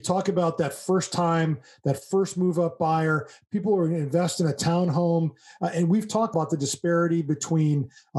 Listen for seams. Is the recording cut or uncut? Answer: uncut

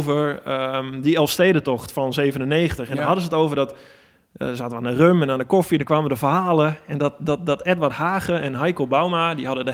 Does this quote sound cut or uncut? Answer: uncut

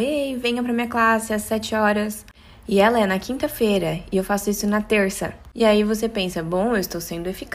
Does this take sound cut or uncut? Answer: uncut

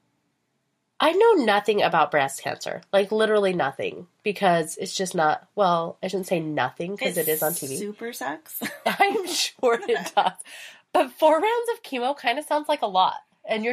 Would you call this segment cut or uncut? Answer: uncut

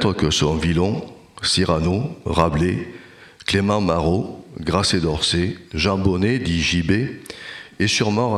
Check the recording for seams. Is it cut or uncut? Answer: cut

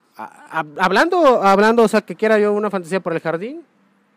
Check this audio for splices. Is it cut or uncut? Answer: uncut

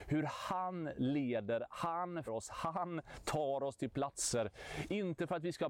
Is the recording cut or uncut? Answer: cut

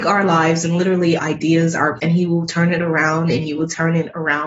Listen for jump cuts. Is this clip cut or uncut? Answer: cut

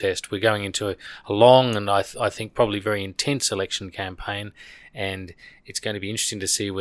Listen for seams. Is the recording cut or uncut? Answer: uncut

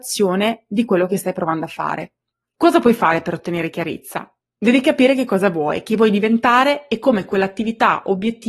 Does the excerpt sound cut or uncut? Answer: uncut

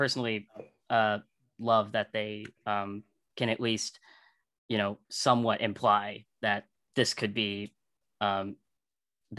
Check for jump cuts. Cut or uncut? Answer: cut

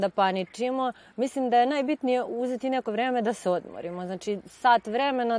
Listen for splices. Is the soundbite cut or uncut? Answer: uncut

